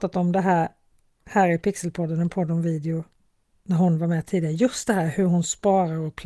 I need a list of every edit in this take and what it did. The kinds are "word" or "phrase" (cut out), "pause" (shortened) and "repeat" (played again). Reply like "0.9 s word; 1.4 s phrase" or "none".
none